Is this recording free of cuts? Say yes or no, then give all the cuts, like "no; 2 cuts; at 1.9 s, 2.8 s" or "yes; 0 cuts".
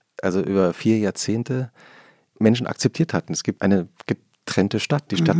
no; 2 cuts; at 2.3 s, 3.6 s